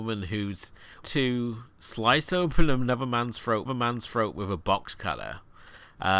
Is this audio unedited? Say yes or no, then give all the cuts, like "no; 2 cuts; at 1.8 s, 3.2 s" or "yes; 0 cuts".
no; 2 cuts; at 1.0 s, 3.7 s